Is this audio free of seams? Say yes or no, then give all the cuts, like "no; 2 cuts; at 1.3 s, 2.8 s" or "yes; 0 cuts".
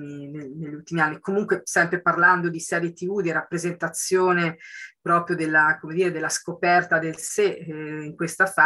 yes; 0 cuts